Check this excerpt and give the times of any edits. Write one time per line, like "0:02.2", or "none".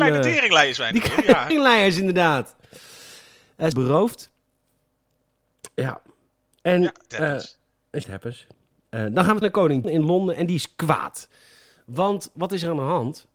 0:01.5
0:03.7
0:07.1
0:08.0
0:09.4
0:09.8